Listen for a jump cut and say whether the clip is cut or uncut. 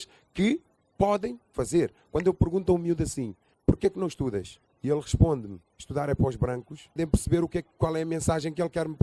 cut